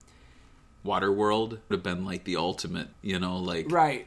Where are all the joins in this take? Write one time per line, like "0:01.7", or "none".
0:01.7
0:02.9